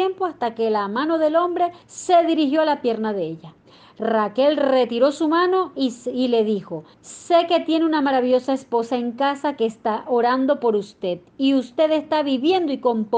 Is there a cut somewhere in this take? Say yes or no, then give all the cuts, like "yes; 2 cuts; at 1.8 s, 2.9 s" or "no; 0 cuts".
yes; 2 cuts; at 1.8 s, 6.9 s